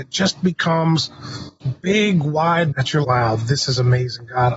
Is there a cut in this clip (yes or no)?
yes